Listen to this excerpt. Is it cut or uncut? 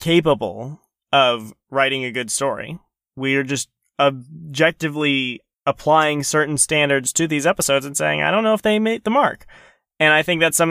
uncut